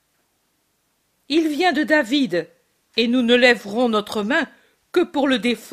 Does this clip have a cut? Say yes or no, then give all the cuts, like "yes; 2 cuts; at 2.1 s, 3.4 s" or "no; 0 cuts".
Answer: no; 0 cuts